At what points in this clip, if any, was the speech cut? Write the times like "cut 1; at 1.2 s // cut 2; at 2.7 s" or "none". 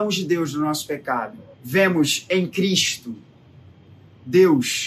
cut 1; at 1.5 s